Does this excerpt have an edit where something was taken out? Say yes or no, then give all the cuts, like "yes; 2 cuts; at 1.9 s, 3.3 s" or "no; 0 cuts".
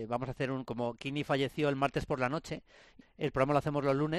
yes; 1 cut; at 3.0 s